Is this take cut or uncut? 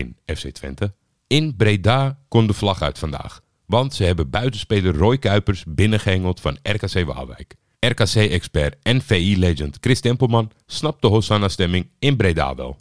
uncut